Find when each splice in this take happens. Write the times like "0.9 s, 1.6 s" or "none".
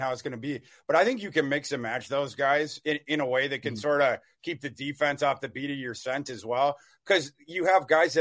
none